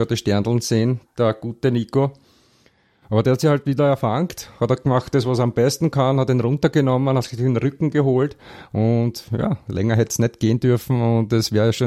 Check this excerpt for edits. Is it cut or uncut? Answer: uncut